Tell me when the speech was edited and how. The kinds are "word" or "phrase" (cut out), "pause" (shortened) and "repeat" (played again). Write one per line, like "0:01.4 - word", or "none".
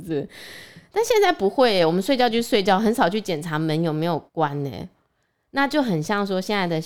0:04.3 - pause

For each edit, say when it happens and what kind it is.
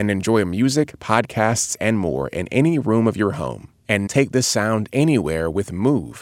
0:04.1 - word

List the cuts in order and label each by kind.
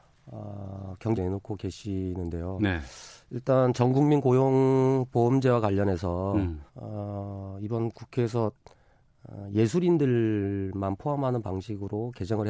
0:01.1 - phrase
0:06.7 - pause

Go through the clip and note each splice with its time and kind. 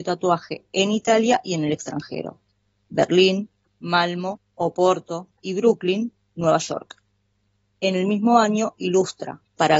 none

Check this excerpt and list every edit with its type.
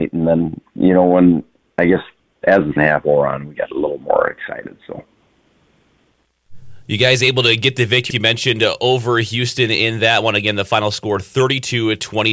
0:02.8 - word
0:08.1 - word

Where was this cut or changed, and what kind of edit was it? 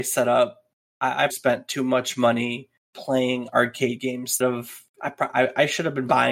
0:01.3 - word
0:04.4 - phrase

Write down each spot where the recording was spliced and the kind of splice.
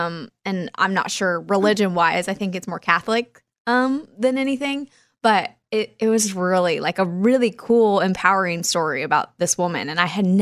none

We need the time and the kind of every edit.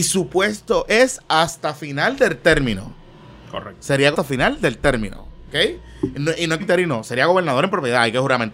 0:04.1 - word
0:06.6 - word

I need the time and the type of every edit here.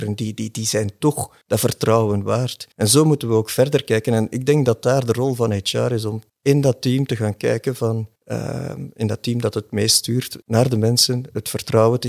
0:01.4 - pause
0:02.7 - pause
0:06.3 - pause
0:08.2 - pause
0:10.4 - pause

